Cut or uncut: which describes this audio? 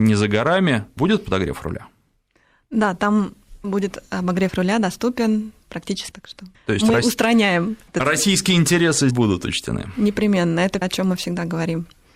cut